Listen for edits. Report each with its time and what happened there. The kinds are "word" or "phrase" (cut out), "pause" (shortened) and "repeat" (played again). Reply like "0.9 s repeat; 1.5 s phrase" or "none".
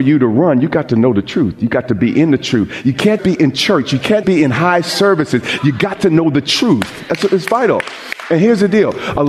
3.2 s word; 4.2 s word

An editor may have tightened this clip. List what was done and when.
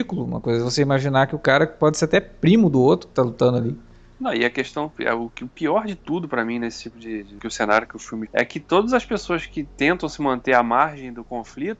8.3 s word

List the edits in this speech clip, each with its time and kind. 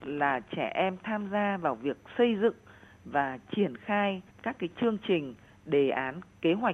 4.3 s pause

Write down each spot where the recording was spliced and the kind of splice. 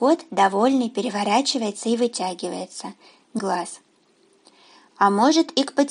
3.4 s word

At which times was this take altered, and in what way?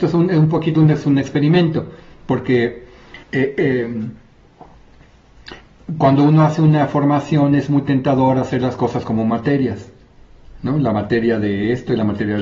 3.2 s pause

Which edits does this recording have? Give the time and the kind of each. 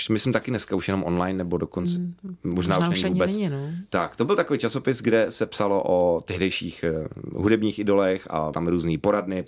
8.5 s word

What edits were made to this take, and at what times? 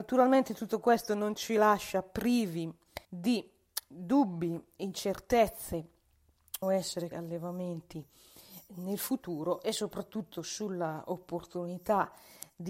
3.0 s pause; 6.6 s phrase; 7.1 s word

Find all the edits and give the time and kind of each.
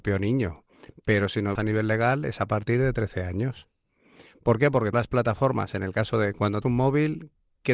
1.5 s word; 4.9 s word; 6.6 s word

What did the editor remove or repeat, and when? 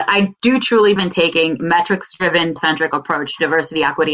1.0 s word; 1.6 s word; 2.6 s word

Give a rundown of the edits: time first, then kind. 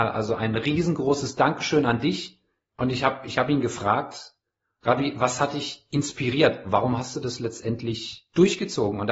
none

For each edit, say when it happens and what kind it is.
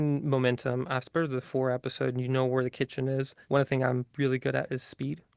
3.4 s pause

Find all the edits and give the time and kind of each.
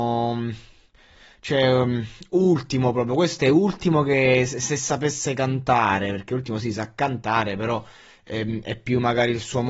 none

